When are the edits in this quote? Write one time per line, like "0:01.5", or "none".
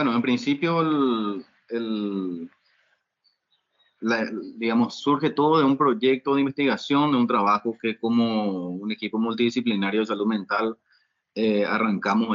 none